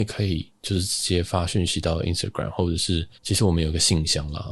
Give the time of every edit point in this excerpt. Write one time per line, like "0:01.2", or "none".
0:03.1